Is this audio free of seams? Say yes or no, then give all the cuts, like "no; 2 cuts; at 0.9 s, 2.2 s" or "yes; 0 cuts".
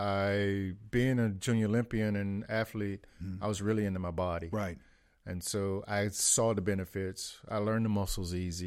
yes; 0 cuts